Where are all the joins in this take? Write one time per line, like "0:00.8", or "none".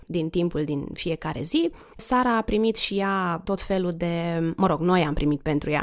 none